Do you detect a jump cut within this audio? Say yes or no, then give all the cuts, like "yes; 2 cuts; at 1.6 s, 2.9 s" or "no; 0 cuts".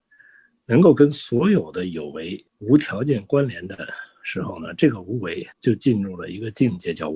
yes; 2 cuts; at 2.5 s, 5.5 s